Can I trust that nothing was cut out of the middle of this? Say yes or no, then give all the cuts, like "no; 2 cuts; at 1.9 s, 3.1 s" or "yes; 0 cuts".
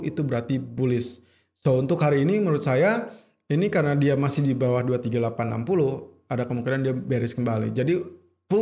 yes; 0 cuts